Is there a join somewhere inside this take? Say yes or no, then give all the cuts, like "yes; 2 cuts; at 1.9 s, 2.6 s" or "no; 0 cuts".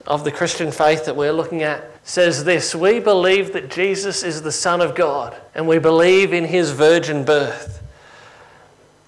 yes; 2 cuts; at 2.0 s, 5.5 s